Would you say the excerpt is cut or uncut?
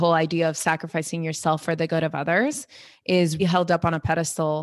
cut